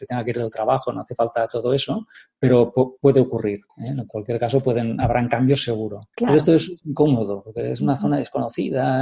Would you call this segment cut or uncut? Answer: cut